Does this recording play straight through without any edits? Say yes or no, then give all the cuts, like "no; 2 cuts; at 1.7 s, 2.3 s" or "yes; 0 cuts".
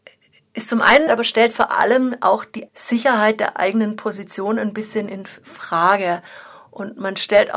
no; 2 cuts; at 1.1 s, 2.7 s